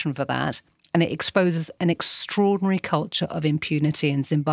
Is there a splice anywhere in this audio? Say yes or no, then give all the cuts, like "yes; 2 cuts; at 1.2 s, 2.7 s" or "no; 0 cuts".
no; 0 cuts